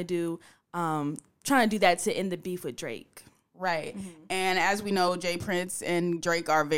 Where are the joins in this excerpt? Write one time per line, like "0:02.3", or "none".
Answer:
none

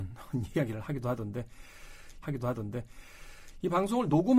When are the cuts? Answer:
0:02.2

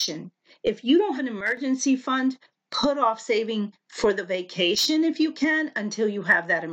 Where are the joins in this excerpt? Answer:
0:01.2

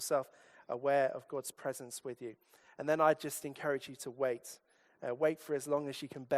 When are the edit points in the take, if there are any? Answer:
none

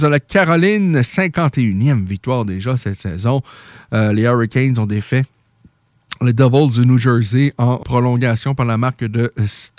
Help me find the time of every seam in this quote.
0:07.8

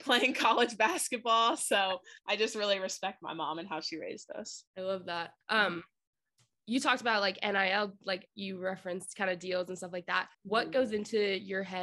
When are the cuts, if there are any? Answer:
0:02.2
0:04.7
0:05.4
0:10.3

